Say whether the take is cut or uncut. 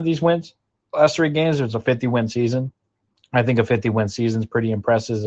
cut